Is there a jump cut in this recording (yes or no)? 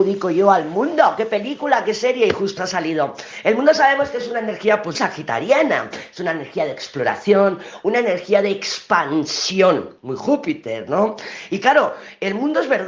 yes